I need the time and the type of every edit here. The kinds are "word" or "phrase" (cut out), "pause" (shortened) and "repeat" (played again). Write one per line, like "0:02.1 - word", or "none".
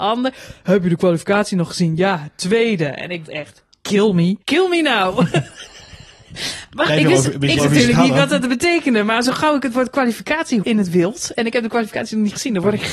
0:03.2 - word
0:04.4 - pause
0:06.9 - phrase
0:07.6 - word
0:10.6 - word